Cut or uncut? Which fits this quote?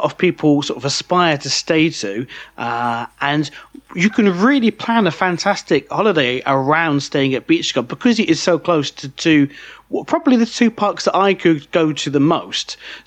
uncut